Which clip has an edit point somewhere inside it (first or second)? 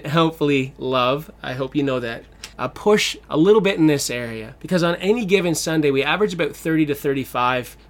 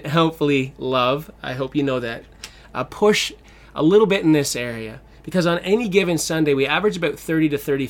first